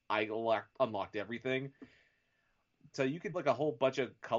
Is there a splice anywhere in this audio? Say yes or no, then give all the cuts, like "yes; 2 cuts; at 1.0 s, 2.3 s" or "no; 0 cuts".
yes; 2 cuts; at 2.9 s, 3.3 s